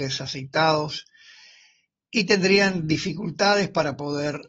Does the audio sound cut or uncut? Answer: uncut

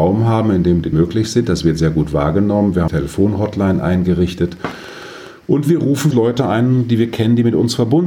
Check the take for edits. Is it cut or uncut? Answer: cut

